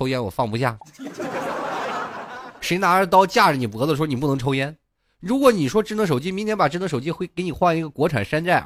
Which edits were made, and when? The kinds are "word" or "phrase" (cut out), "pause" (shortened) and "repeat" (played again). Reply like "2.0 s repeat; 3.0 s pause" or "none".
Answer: none